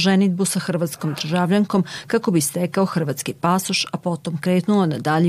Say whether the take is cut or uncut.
uncut